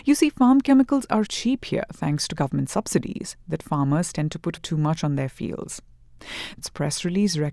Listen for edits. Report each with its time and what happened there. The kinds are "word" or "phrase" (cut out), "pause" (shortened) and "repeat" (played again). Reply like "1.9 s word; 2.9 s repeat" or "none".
1.2 s word; 4.6 s word; 6.6 s phrase